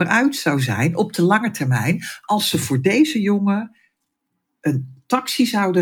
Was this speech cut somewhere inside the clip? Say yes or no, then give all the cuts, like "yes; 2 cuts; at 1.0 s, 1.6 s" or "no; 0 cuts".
no; 0 cuts